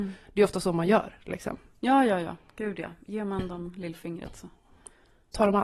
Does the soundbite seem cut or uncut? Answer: uncut